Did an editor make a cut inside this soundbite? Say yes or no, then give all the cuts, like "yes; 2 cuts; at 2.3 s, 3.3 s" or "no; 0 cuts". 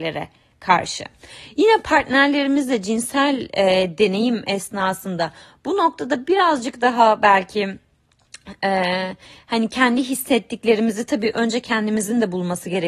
no; 0 cuts